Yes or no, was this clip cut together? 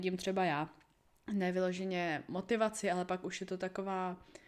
no